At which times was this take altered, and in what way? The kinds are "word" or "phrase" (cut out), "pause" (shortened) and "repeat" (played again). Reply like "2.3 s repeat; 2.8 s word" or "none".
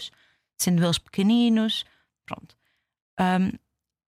none